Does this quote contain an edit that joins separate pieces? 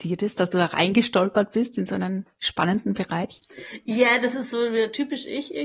no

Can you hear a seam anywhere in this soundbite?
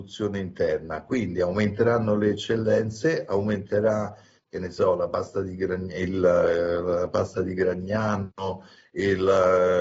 no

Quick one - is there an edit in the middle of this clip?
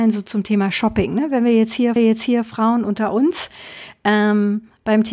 yes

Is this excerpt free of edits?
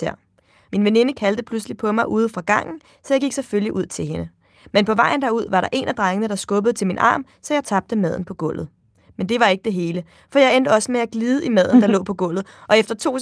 yes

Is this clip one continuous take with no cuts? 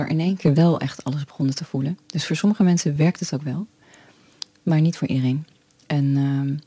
yes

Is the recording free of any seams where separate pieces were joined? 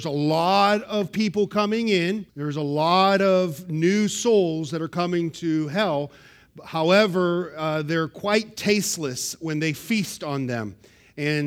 no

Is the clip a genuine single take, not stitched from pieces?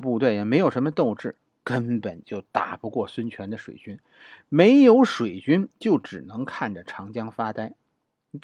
yes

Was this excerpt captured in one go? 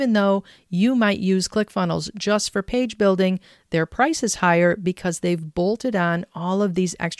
yes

